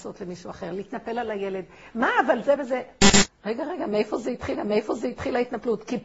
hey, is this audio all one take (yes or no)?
no